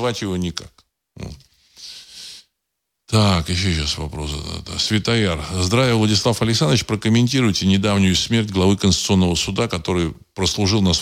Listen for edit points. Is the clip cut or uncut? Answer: uncut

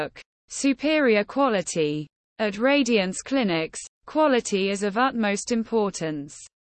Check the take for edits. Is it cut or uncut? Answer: uncut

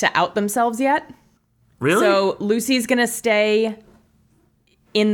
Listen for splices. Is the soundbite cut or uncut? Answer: cut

